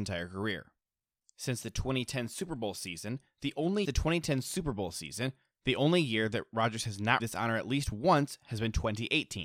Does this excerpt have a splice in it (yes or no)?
yes